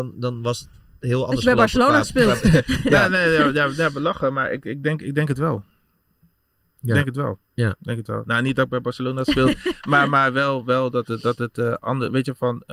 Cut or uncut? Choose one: uncut